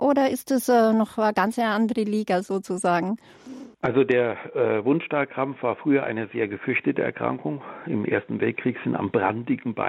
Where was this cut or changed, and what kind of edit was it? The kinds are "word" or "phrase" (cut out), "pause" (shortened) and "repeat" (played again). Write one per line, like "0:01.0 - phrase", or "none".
0:03.7 - pause